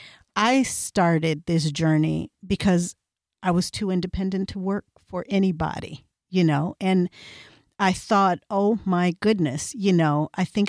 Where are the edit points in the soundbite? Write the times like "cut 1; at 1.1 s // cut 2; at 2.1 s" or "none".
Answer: cut 1; at 6.8 s

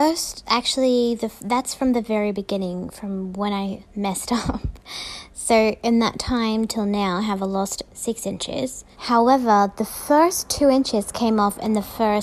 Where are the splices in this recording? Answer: cut 1; at 3.9 s // cut 2; at 7.9 s // cut 3; at 8.9 s

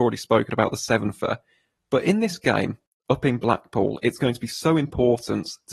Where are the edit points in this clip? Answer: none

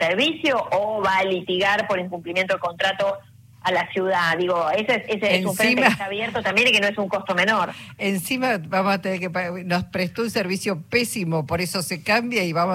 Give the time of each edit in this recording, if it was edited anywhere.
none

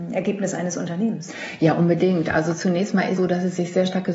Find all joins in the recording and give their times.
cut 1; at 3.2 s

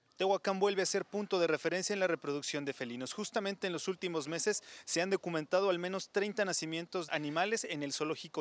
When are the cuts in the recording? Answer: cut 1; at 7.1 s

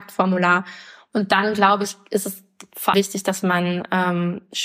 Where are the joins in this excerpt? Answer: cut 1; at 2.9 s

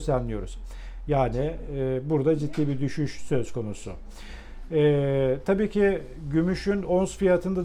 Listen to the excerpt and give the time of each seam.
none

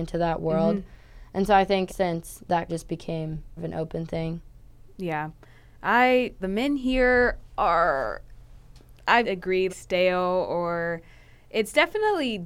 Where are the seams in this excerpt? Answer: cut 1; at 1.9 s // cut 2; at 2.7 s // cut 3; at 3.6 s // cut 4; at 6.4 s // cut 5; at 9.2 s // cut 6; at 9.7 s

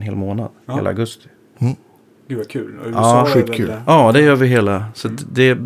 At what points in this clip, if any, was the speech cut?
none

